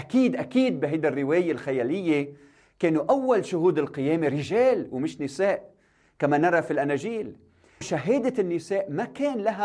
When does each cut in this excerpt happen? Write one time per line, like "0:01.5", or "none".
0:07.8